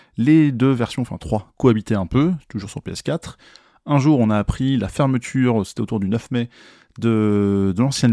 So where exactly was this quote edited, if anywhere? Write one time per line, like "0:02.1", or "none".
none